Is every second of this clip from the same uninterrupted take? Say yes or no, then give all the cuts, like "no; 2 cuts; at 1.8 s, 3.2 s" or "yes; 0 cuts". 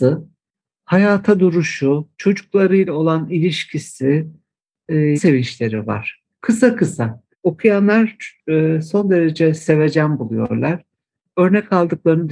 no; 3 cuts; at 2.1 s, 5.2 s, 7.3 s